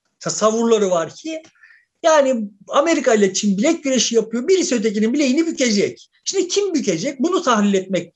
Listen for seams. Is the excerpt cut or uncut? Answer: uncut